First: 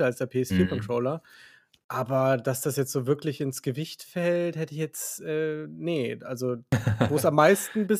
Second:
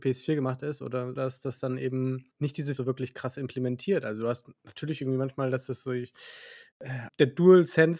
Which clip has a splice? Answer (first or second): second